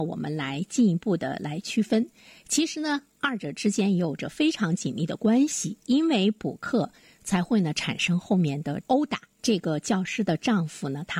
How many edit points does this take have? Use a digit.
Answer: 0